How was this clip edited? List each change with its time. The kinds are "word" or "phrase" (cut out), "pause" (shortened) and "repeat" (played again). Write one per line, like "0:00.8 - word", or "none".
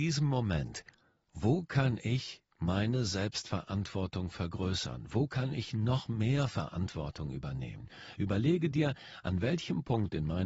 none